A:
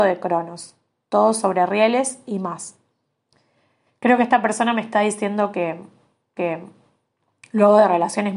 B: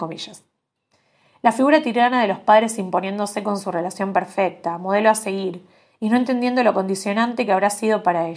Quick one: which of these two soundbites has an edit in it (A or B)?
A